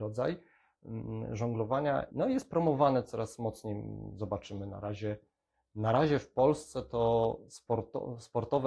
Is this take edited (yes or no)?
no